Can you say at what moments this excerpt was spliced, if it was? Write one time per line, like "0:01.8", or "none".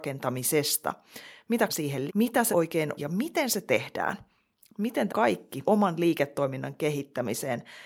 0:01.7
0:02.1
0:02.5
0:03.0
0:05.1
0:05.6